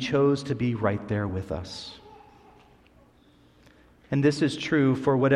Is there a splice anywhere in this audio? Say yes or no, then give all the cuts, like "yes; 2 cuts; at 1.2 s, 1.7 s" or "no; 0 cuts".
no; 0 cuts